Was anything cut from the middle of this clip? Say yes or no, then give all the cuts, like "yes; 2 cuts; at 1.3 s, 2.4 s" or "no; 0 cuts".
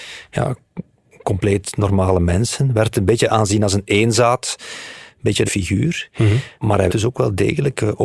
yes; 3 cuts; at 5.5 s, 6.6 s, 6.9 s